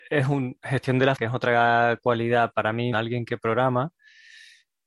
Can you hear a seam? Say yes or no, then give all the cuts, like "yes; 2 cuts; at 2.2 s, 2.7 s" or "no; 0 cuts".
yes; 2 cuts; at 1.2 s, 2.9 s